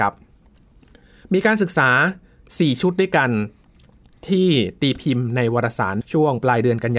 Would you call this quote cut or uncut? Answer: cut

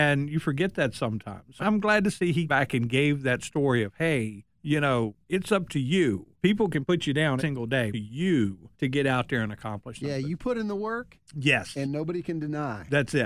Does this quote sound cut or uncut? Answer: cut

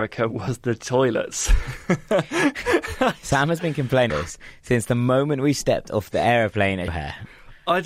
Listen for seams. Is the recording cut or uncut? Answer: cut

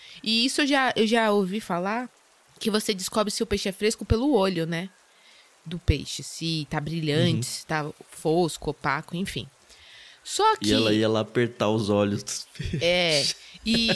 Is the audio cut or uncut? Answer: uncut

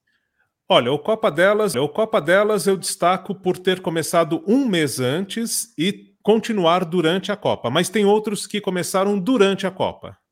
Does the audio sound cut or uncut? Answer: cut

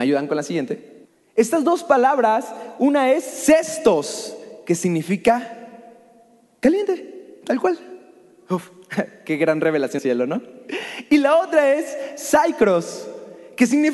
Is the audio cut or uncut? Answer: cut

